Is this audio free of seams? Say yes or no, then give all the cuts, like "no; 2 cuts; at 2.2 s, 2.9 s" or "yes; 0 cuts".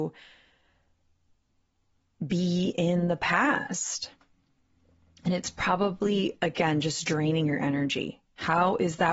yes; 0 cuts